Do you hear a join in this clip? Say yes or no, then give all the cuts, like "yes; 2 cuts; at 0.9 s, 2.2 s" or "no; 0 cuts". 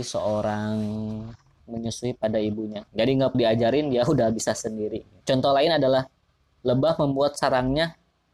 yes; 4 cuts; at 1.6 s, 2.9 s, 3.3 s, 5.2 s